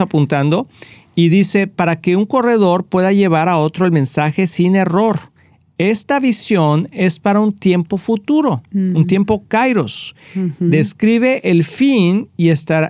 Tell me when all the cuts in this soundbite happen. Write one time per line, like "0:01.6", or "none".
none